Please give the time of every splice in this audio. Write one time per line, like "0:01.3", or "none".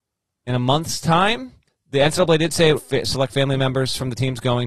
0:01.7
0:02.8